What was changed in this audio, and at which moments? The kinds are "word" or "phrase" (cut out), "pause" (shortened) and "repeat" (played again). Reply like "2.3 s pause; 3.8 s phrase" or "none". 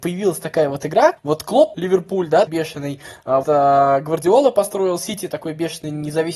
1.2 s pause; 1.7 s word; 2.5 s word; 3.4 s word